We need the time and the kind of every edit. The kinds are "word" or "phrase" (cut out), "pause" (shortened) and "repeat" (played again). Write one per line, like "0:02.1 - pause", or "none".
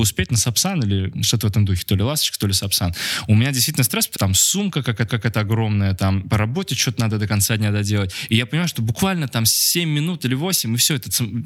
0:04.2 - word
0:05.1 - repeat